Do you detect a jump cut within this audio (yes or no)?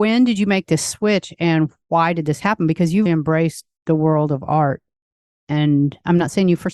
yes